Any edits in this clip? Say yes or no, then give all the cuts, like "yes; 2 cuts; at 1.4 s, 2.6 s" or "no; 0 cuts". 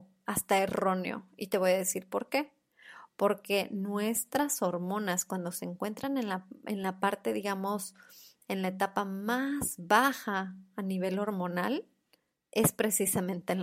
no; 0 cuts